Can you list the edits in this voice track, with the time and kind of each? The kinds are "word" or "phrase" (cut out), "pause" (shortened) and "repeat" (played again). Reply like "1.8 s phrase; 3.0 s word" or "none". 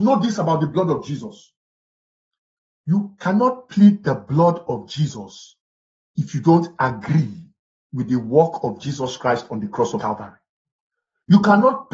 none